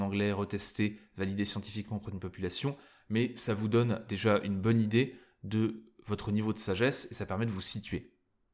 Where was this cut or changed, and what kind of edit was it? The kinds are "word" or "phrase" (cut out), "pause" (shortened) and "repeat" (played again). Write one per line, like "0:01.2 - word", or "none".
none